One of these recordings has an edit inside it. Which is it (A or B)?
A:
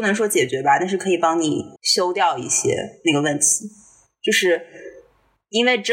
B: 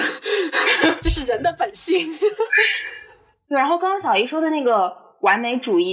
A